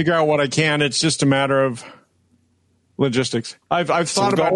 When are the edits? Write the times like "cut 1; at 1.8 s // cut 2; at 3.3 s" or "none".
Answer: cut 1; at 3.6 s